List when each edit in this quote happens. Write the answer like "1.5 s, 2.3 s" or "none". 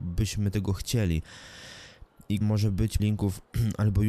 2.4 s, 3.0 s